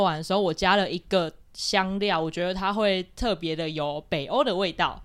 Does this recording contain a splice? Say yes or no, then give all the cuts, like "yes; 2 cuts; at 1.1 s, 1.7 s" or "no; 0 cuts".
yes; 1 cut; at 1.4 s